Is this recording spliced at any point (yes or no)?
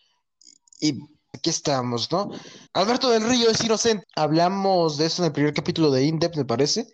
yes